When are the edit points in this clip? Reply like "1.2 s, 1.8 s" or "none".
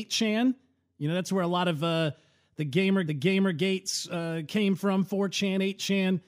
3.1 s